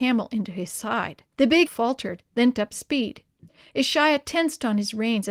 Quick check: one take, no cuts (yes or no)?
no